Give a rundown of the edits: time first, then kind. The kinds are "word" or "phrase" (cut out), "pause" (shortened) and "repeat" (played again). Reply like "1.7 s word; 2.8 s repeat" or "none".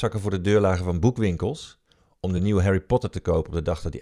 none